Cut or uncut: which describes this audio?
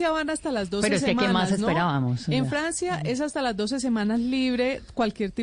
uncut